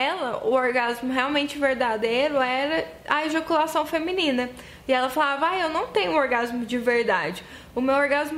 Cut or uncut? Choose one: uncut